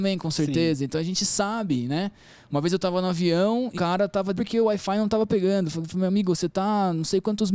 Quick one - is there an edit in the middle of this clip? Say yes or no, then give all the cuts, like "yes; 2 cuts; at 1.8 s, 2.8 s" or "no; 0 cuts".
yes; 2 cuts; at 3.7 s, 4.4 s